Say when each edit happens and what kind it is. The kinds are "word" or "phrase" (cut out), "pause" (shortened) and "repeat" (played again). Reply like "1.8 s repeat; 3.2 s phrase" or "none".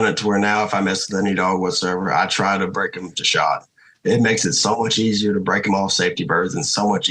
none